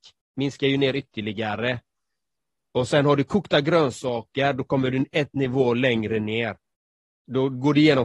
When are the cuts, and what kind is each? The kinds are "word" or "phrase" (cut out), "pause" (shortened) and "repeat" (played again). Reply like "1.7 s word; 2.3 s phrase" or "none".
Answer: none